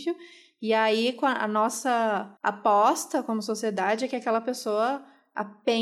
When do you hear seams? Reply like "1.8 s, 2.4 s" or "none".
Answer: 2.4 s